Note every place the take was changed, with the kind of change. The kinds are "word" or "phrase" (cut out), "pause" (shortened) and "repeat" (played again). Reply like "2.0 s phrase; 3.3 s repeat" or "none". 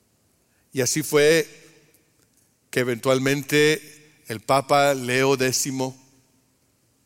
none